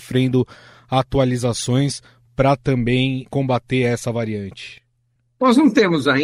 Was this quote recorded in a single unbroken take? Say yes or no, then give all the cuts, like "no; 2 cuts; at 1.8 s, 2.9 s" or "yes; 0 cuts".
yes; 0 cuts